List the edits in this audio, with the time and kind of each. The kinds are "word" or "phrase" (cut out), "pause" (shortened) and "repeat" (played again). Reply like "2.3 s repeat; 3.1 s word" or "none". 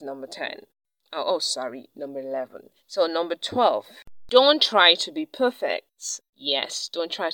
2.8 s pause; 6.3 s pause